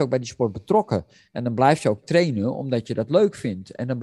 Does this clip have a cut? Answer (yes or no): no